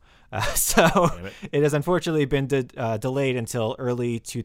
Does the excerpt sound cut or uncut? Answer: uncut